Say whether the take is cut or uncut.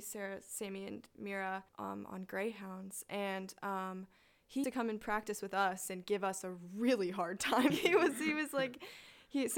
cut